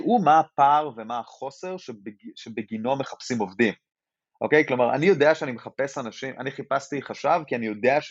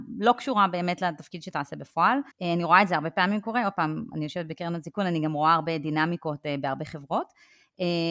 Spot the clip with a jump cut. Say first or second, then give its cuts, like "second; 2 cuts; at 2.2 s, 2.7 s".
second; 1 cut; at 2.3 s